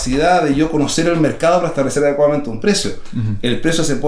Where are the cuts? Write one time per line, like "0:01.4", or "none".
none